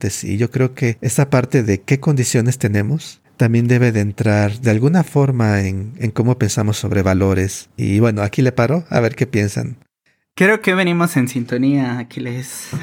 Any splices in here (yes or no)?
no